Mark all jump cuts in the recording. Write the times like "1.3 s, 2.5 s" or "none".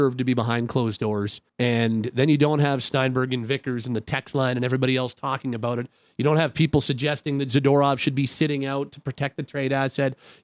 1.5 s